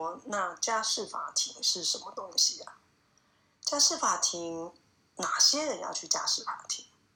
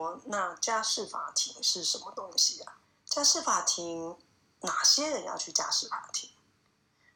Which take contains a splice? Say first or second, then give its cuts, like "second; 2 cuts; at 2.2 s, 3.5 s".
second; 1 cut; at 2.8 s